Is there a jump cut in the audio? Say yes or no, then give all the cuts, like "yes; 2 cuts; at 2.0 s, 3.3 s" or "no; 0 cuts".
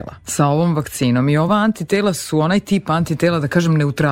no; 0 cuts